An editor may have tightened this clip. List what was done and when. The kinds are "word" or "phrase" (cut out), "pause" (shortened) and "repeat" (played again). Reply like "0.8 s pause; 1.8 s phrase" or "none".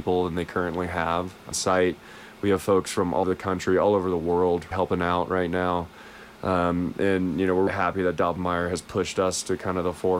1.5 s word; 3.2 s word; 4.7 s word; 7.7 s word